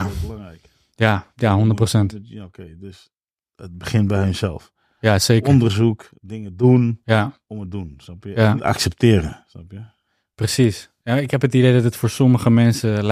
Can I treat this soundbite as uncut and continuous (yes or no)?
no